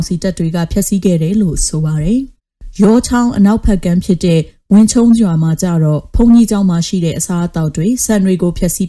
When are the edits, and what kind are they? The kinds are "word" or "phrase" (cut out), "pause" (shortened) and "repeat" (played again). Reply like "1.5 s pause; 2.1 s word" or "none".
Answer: 2.4 s pause